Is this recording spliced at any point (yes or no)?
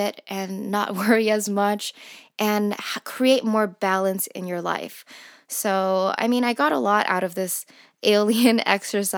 no